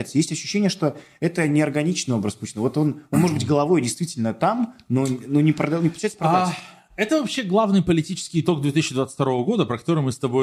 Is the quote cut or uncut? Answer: uncut